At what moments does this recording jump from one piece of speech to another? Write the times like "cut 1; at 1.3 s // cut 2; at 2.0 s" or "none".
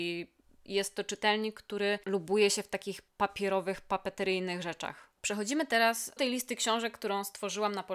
cut 1; at 2.0 s // cut 2; at 3.1 s // cut 3; at 5.2 s // cut 4; at 6.2 s